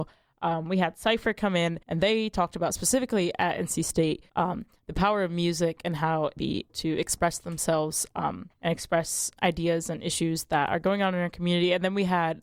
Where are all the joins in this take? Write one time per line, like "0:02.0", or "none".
0:01.8
0:04.3
0:06.4
0:06.7
0:08.5
0:09.4